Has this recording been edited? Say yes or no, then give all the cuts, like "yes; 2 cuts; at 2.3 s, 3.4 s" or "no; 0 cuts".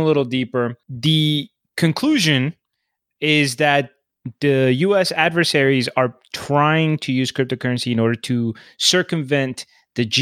no; 0 cuts